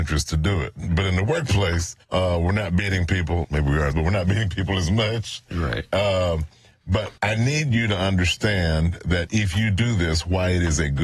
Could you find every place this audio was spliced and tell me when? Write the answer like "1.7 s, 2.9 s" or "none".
2.0 s, 3.4 s, 3.9 s, 7.2 s